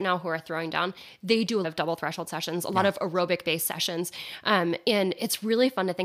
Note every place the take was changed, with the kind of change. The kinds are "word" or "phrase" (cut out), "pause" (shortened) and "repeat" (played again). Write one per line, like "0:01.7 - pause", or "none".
0:01.6 - word